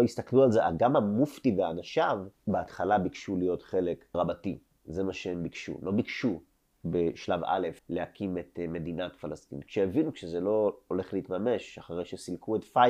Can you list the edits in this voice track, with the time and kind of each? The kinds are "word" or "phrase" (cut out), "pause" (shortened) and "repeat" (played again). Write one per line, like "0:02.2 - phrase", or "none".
0:02.3 - pause
0:04.1 - word
0:07.8 - pause